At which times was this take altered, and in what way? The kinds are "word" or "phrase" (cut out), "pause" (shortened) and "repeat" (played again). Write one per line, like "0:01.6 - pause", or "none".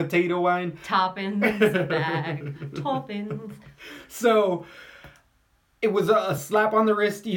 none

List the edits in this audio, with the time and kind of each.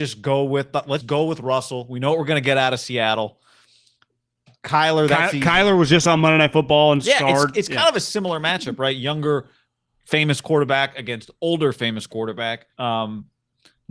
0:01.0 - word
0:12.7 - pause

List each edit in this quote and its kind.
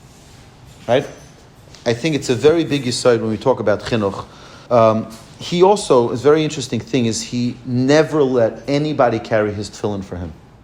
0:04.7 - pause

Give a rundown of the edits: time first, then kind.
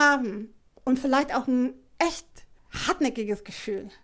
none

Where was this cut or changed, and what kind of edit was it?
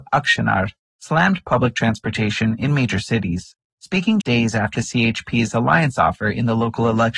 0:04.2 - word
0:04.7 - phrase

